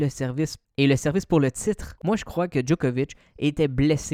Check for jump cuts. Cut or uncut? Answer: uncut